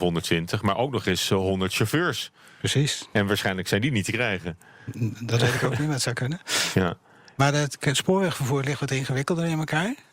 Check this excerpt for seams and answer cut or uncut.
uncut